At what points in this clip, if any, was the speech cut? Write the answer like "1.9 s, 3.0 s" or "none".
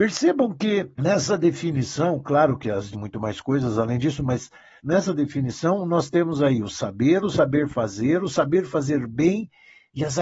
0.9 s, 2.9 s, 4.8 s